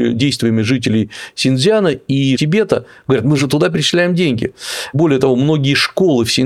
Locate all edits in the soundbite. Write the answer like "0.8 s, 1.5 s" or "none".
3.4 s